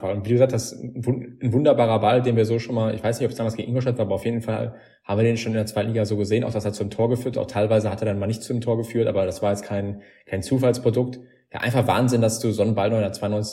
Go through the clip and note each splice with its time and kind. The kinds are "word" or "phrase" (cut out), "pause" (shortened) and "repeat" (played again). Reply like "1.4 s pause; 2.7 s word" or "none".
none